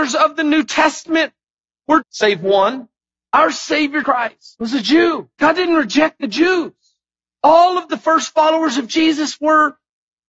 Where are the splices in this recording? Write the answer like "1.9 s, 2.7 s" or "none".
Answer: 2.0 s, 3.0 s, 4.0 s, 4.5 s, 5.3 s